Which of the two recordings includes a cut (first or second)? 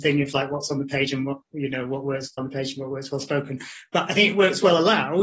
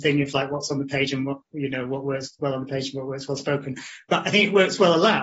first